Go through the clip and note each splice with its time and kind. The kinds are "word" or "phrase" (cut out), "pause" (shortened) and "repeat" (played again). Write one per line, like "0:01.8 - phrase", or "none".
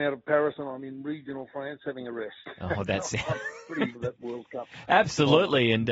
0:03.9 - phrase